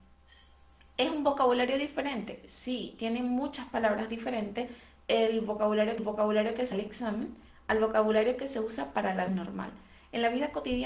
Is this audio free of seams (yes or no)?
no